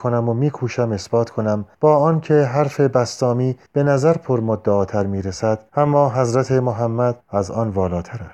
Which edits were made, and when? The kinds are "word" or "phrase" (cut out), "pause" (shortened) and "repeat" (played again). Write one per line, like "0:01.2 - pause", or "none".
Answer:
0:01.7 - pause
0:03.7 - pause
0:05.7 - pause
0:07.2 - pause